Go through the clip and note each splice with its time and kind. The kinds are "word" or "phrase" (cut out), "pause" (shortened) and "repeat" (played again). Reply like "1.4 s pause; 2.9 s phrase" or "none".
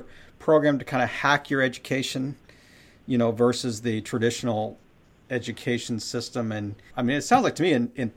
6.9 s word